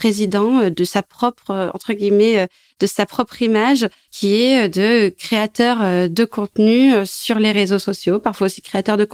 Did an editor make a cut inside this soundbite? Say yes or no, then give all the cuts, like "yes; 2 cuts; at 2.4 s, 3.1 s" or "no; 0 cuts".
no; 0 cuts